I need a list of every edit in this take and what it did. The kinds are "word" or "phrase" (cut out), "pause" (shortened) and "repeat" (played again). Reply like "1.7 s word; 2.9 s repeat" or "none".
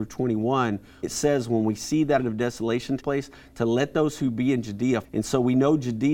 1.0 s word; 2.2 s word; 3.0 s word; 5.0 s word